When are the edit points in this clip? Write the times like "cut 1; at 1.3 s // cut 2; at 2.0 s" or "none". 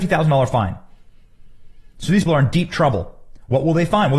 cut 1; at 2.3 s

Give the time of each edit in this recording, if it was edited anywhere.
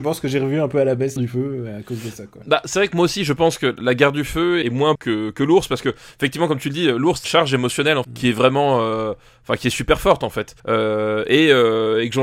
cut 1; at 1.2 s // cut 2; at 4.6 s // cut 3; at 5.0 s // cut 4; at 7.2 s // cut 5; at 8.0 s // cut 6; at 10.6 s

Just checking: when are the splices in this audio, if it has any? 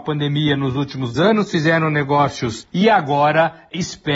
cut 1; at 1.1 s // cut 2; at 2.7 s

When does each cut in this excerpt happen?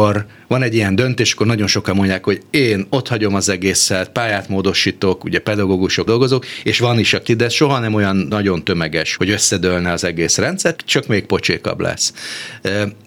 cut 1; at 6.1 s // cut 2; at 7.3 s // cut 3; at 9.2 s // cut 4; at 10.8 s

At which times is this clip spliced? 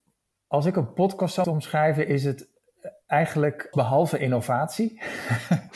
cut 1; at 1.4 s // cut 2; at 3.7 s

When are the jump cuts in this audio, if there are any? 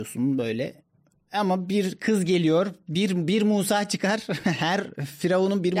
none

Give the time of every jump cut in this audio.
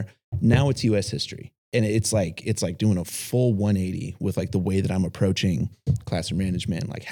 cut 1; at 1.6 s

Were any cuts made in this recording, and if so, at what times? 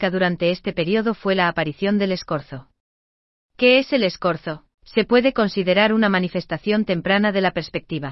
cut 1; at 4.7 s

